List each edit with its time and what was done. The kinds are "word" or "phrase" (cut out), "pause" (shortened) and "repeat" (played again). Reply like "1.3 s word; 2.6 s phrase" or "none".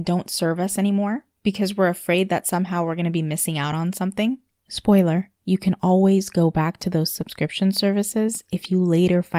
none